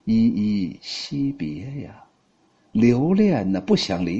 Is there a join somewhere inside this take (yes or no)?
no